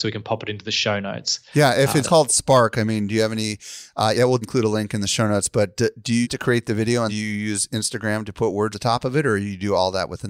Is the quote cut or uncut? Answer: cut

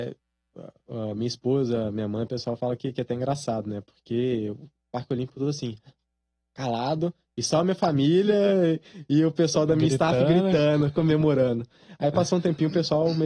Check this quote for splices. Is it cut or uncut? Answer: uncut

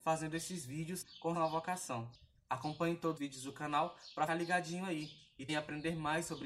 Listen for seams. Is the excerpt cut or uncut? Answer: cut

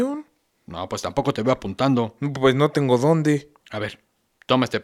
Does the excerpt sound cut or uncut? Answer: cut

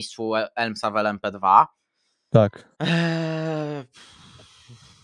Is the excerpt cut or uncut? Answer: cut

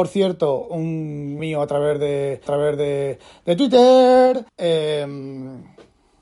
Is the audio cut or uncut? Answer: cut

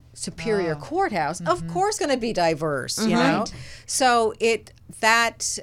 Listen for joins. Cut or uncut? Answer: cut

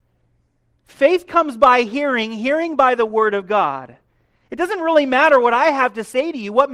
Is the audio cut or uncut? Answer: uncut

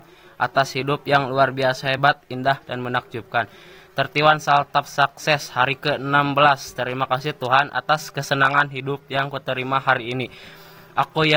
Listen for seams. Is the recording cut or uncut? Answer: uncut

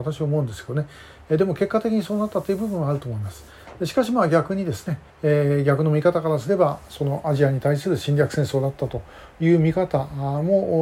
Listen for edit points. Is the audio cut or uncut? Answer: cut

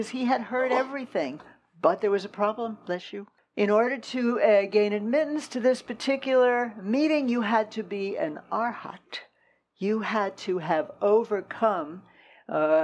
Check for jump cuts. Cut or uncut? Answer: uncut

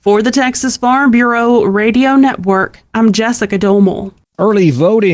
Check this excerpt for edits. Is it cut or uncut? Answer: uncut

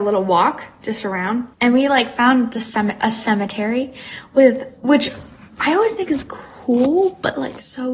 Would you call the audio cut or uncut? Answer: cut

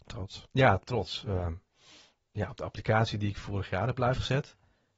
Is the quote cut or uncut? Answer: uncut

